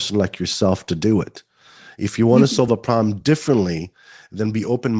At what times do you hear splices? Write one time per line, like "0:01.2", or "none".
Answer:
none